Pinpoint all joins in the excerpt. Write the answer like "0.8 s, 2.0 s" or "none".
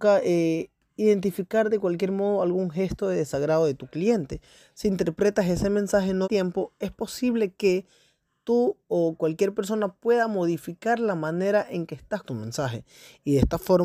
6.2 s, 12.2 s